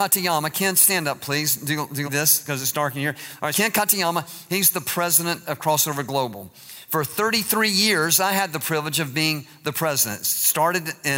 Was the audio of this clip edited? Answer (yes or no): yes